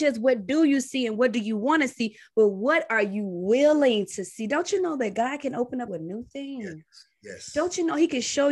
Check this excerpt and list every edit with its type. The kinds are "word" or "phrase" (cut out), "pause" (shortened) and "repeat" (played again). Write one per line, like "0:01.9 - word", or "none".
0:05.9 - phrase